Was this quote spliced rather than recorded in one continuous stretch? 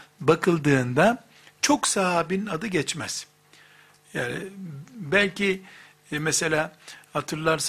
no; 0 cuts

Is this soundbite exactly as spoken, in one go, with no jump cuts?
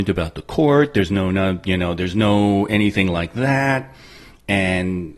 yes; 0 cuts

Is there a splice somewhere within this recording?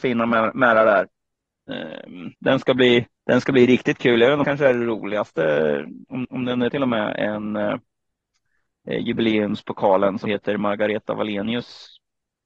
yes; 6 cuts; at 2.3 s, 3.2 s, 4.4 s, 6.2 s, 6.7 s, 10.3 s

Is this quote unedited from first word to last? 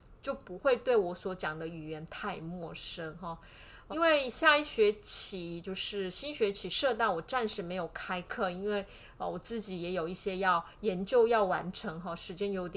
no; 1 cut; at 3.9 s

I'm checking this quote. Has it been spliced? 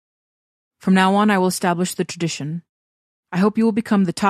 no; 0 cuts

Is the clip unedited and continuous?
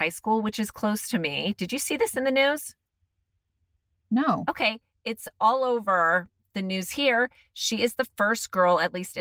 yes; 0 cuts

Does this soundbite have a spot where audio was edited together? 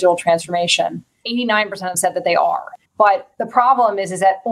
yes; 3 cuts; at 1.2 s, 1.9 s, 2.8 s

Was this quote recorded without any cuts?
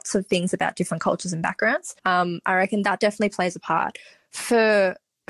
no; 1 cut; at 2.0 s

